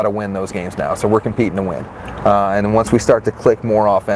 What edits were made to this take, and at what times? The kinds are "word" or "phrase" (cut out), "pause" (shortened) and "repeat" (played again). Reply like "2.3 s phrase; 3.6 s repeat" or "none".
none